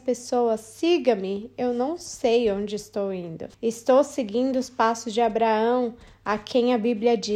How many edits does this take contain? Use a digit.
1